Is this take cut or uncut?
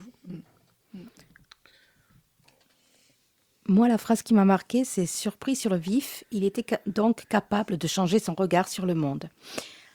uncut